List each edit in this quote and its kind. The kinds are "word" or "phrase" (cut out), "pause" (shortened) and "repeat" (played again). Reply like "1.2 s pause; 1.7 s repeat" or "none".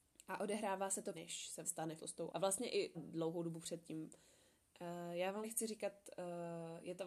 1.1 s word; 1.6 s word; 2.0 s word; 2.3 s word; 2.9 s word; 5.4 s word